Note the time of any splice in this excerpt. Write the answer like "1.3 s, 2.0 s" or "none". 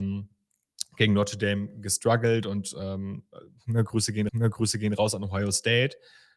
4.3 s